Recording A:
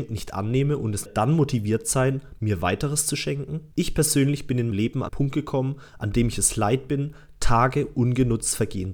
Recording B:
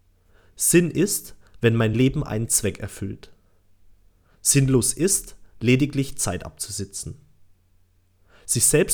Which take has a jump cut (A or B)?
A